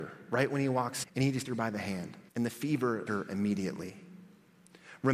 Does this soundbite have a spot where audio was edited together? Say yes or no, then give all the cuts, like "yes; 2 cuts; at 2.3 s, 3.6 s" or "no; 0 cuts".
yes; 4 cuts; at 1.0 s, 1.4 s, 2.3 s, 3.1 s